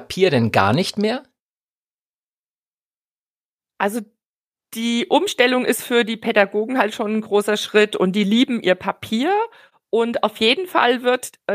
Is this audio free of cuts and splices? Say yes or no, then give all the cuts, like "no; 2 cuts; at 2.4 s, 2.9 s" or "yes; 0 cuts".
yes; 0 cuts